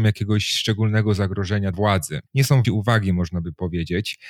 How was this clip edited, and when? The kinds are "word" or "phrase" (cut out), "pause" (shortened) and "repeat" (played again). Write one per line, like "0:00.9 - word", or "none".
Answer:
0:01.7 - word
0:02.3 - pause
0:02.6 - word